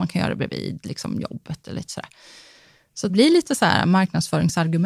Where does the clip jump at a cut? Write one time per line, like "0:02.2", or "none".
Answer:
0:03.1